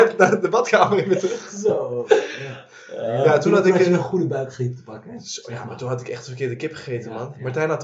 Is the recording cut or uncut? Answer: uncut